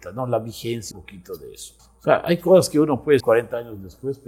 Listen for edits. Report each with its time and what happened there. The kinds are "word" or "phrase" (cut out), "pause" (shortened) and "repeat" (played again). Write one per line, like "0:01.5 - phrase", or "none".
0:00.9 - word
0:01.8 - pause
0:03.2 - word